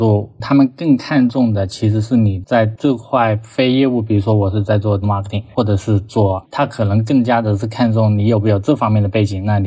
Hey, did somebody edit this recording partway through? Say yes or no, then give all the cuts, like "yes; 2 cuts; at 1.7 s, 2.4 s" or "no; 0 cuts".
yes; 2 cuts; at 5.0 s, 6.4 s